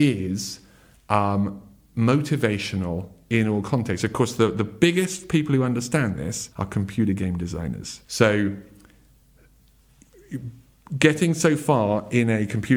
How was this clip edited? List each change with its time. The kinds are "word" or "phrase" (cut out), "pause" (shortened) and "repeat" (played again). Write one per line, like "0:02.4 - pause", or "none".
0:06.5 - pause
0:08.0 - pause